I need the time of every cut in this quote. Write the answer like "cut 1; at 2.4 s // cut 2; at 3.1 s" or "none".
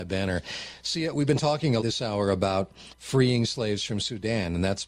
cut 1; at 1.8 s // cut 2; at 2.9 s